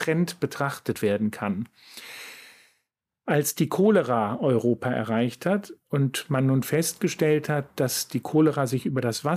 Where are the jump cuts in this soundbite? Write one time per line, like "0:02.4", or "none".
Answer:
none